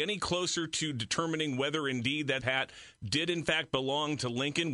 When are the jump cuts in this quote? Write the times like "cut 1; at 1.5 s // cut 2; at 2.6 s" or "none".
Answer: cut 1; at 2.4 s